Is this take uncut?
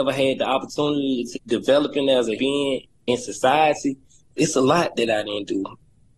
no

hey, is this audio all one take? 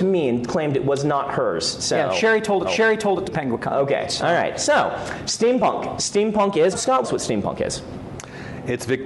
no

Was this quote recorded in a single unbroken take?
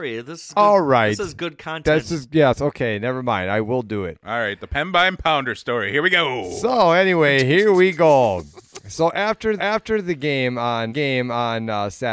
no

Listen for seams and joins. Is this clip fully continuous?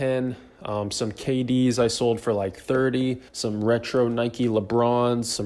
no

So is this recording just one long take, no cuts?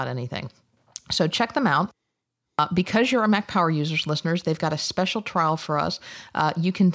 yes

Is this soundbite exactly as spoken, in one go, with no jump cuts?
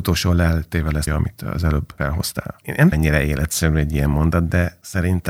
no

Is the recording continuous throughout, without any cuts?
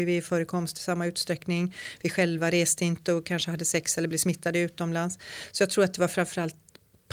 yes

